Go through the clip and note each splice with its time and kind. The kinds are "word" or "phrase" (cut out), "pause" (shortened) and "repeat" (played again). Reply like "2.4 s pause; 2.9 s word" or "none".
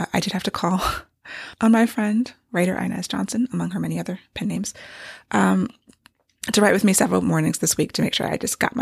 none